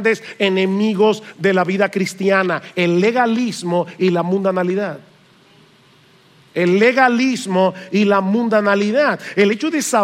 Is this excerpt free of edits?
yes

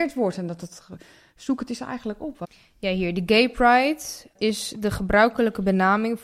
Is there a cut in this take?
yes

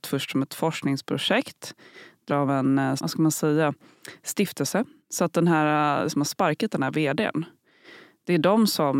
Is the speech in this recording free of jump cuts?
no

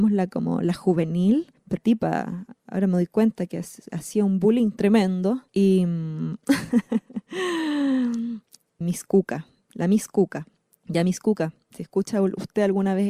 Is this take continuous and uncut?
no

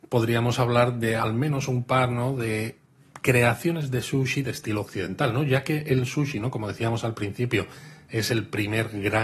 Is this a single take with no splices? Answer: yes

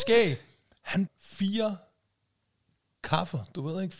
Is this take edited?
yes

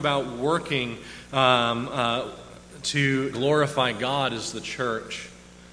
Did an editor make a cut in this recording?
yes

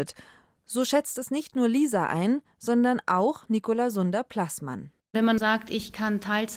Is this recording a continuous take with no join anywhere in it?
yes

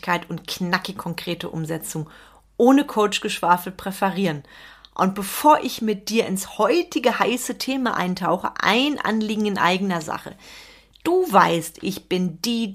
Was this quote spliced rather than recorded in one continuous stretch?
no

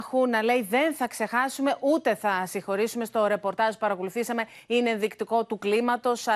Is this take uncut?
yes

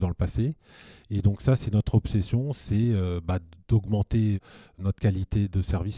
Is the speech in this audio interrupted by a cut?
no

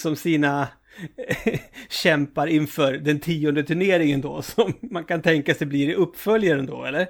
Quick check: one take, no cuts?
yes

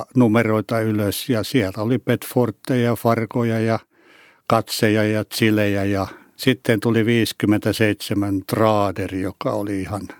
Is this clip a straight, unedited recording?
yes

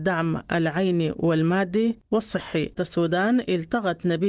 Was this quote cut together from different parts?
yes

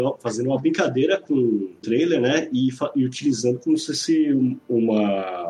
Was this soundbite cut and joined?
no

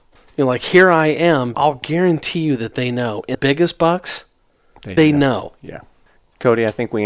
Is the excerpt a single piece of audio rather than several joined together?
no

